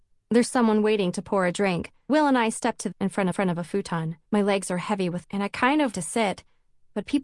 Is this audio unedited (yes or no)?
no